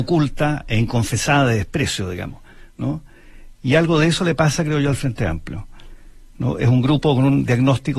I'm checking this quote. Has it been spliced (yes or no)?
no